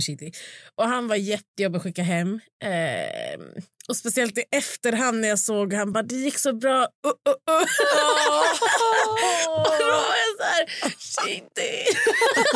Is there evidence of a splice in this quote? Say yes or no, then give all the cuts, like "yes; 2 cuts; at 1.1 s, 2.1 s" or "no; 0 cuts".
no; 0 cuts